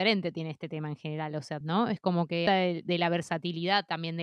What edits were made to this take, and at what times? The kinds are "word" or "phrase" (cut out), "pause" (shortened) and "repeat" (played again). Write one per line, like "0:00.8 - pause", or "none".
0:01.6 - word
0:02.5 - phrase

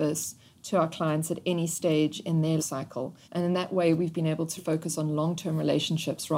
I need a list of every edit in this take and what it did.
0:02.6 - word
0:03.2 - pause
0:04.6 - word

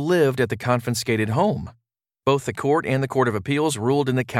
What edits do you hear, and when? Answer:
0:02.5 - word

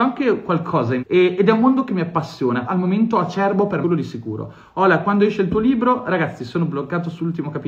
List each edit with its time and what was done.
0:01.0 - word
0:02.6 - word
0:03.8 - word

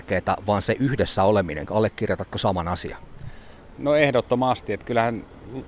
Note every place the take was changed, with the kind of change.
none

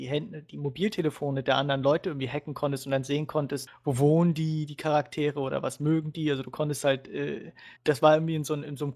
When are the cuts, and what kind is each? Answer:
0:03.7 - word
0:07.8 - pause

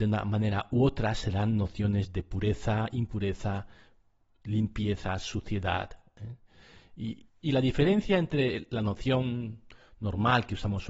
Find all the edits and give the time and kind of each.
0:07.3 - word

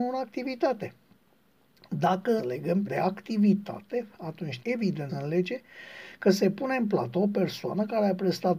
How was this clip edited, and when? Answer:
0:02.4 - word
0:02.8 - word
0:04.6 - word
0:05.1 - word

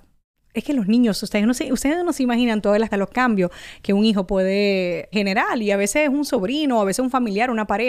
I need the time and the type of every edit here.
0:02.9 - word
0:05.1 - word

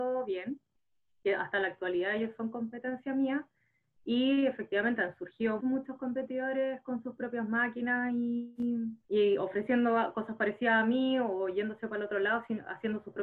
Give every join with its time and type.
0:05.6 - word
0:09.0 - pause

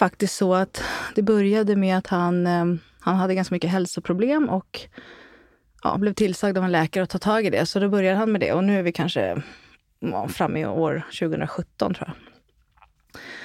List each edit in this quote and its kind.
none

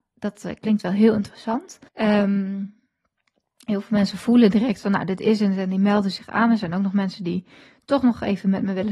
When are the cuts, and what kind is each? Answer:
0:01.9 - pause

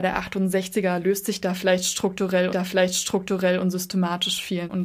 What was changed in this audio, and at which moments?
0:02.5 - repeat

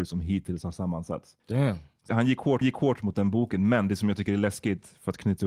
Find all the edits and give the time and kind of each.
0:01.4 - pause
0:02.1 - word
0:02.6 - repeat

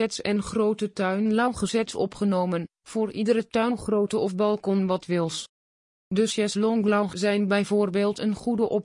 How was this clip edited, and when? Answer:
0:07.1 - word

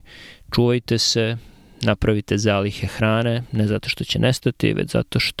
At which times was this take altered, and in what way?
none

